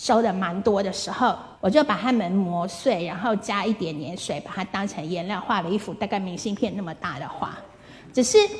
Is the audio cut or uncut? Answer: cut